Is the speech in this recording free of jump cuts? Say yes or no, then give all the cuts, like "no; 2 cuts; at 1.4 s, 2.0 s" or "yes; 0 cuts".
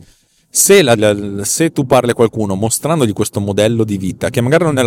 no; 1 cut; at 1.0 s